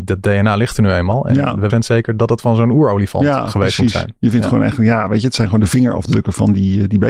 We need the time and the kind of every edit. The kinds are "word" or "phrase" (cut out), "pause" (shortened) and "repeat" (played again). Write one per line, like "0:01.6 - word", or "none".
0:01.7 - word